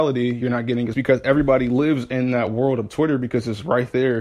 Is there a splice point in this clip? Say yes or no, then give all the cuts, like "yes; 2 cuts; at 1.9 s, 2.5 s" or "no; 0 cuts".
yes; 1 cut; at 0.9 s